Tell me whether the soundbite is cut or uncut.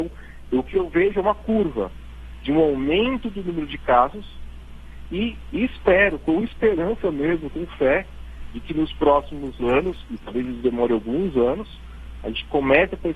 uncut